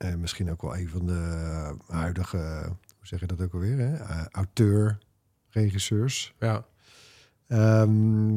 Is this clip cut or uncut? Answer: uncut